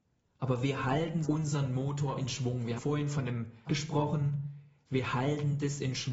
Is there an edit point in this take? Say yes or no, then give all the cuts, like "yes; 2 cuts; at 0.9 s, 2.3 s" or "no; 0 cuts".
yes; 3 cuts; at 1.2 s, 2.8 s, 3.7 s